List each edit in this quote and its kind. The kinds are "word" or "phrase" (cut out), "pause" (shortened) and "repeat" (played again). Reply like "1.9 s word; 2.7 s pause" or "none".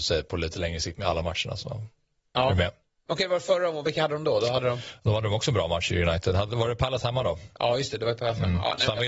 none